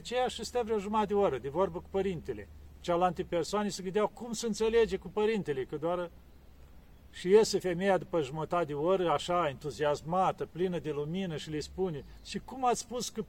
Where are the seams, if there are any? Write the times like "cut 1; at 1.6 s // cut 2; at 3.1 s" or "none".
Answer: none